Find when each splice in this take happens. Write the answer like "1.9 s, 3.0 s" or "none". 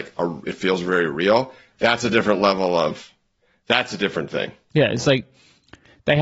none